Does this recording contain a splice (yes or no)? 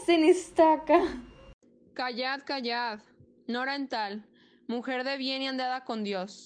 no